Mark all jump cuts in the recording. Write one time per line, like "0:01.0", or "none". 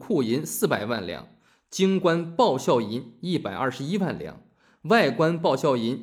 none

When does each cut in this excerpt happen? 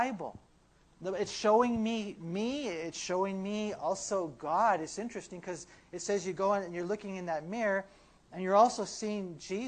none

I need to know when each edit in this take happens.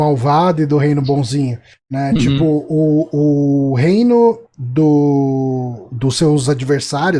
none

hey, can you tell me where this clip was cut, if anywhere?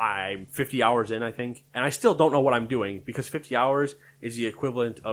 0:01.7

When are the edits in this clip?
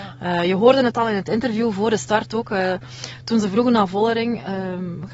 none

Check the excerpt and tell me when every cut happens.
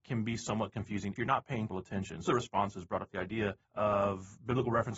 0:01.2
0:01.7
0:02.3
0:03.6

